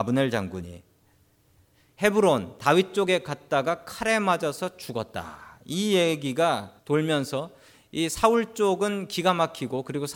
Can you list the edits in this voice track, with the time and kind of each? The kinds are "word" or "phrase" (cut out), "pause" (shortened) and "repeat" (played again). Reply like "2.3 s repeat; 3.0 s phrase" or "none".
6.8 s pause